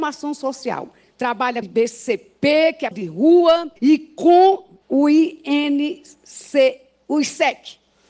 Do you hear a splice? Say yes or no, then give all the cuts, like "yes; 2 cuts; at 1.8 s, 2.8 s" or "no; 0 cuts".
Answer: yes; 4 cuts; at 1.6 s, 2.9 s, 3.8 s, 4.8 s